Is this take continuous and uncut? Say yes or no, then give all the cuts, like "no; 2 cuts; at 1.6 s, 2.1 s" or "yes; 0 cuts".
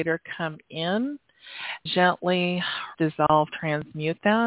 no; 2 cuts; at 1.9 s, 2.9 s